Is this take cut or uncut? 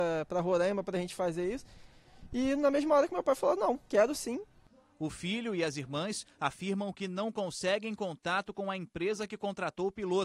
uncut